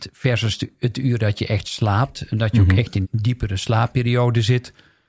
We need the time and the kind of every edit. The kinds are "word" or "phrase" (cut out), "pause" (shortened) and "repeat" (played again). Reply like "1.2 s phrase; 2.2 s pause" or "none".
3.0 s word